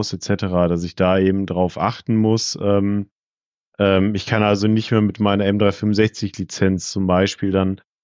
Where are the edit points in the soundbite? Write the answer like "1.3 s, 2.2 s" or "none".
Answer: none